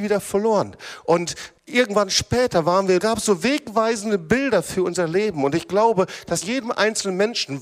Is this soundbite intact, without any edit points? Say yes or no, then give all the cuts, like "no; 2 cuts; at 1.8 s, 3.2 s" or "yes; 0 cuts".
no; 3 cuts; at 1.6 s, 3.0 s, 6.4 s